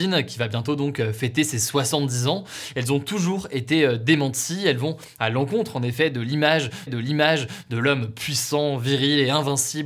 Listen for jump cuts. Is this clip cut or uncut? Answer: cut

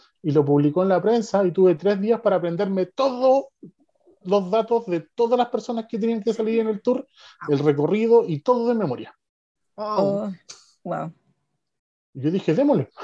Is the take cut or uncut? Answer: uncut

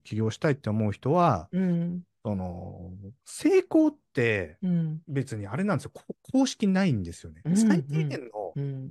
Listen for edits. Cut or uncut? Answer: uncut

